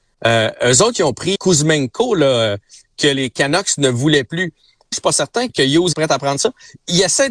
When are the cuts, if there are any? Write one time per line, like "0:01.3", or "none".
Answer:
0:01.4
0:04.9
0:05.5
0:05.9